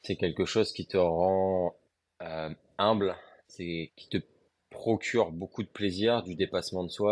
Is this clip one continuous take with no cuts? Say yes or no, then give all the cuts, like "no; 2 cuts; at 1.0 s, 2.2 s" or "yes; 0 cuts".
no; 1 cut; at 3.9 s